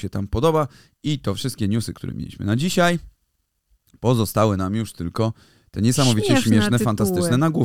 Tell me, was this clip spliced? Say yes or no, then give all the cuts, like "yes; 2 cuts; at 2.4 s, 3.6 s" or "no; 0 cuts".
no; 0 cuts